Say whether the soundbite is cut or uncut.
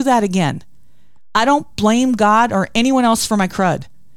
uncut